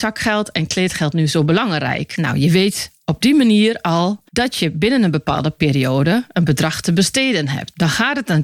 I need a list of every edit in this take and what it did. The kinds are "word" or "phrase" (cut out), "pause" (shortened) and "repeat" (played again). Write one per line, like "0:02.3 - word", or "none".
0:04.3 - pause